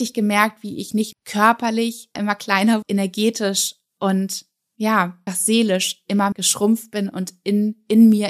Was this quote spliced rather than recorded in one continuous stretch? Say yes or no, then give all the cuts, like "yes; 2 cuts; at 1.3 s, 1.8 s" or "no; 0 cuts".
yes; 5 cuts; at 1.1 s, 2.2 s, 2.8 s, 5.3 s, 6.3 s